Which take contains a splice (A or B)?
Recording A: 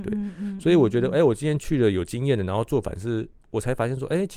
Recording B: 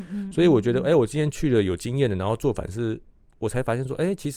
A